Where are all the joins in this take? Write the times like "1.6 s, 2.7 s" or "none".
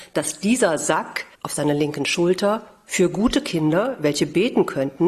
1.3 s